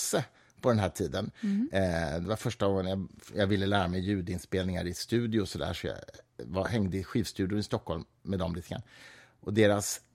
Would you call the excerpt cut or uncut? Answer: uncut